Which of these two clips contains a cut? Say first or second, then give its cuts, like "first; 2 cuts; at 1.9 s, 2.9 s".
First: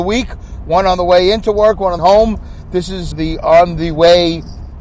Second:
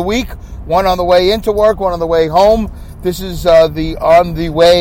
first; 2 cuts; at 2.0 s, 3.1 s